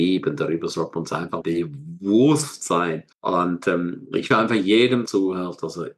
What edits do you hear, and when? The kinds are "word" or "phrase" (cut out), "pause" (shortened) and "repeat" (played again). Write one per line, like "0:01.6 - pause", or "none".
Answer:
0:01.4 - word
0:03.1 - pause
0:04.3 - word
0:05.1 - phrase